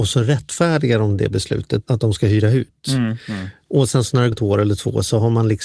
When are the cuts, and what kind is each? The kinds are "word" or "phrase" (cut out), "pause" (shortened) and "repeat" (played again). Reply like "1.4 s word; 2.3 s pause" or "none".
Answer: 1.8 s word; 4.3 s word